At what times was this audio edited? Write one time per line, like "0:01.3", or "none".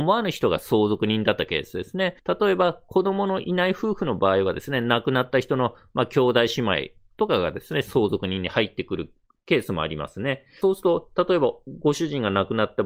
0:02.2